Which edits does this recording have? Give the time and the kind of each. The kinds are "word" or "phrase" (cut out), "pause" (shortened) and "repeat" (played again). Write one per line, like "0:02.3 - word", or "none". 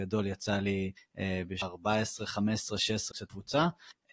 0:03.1 - word